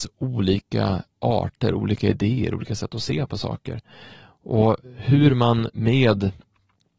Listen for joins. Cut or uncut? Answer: uncut